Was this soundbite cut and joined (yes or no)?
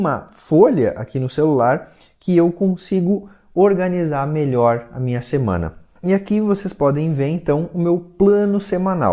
no